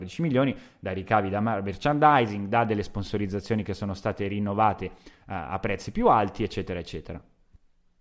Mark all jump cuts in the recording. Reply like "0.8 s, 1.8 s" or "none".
none